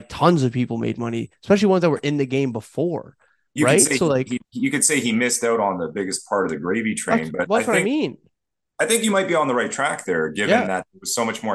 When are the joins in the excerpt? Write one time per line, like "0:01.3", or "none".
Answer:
0:04.4